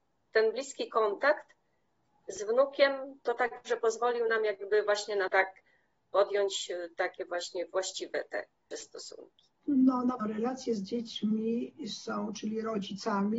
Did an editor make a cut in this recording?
yes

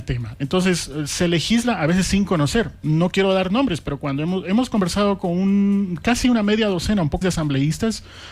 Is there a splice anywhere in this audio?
yes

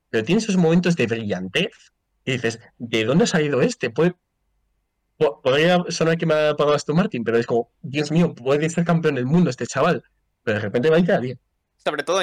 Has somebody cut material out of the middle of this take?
no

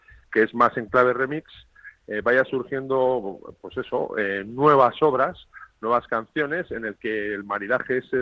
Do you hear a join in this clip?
no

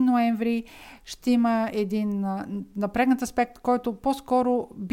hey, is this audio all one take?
yes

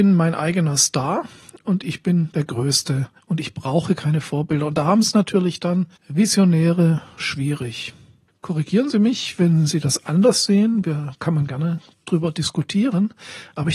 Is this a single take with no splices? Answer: no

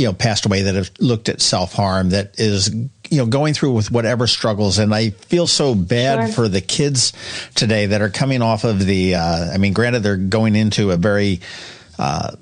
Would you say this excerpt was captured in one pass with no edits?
yes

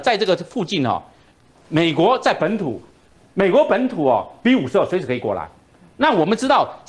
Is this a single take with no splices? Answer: yes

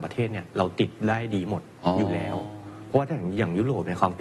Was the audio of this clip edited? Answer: yes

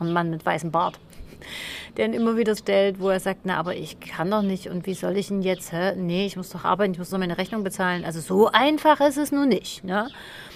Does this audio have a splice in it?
yes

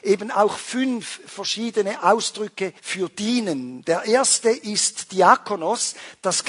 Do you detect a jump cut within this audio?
yes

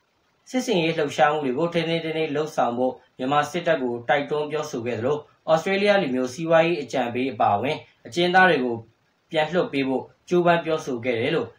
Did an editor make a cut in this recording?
no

